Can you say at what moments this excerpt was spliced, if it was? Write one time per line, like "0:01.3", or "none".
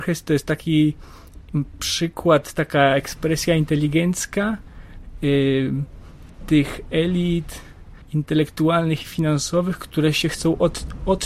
0:08.0